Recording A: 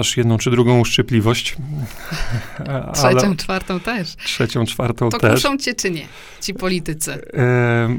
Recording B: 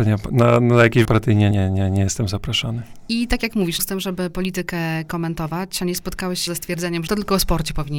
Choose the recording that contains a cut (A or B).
B